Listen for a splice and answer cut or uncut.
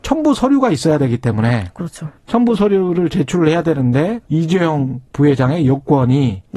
cut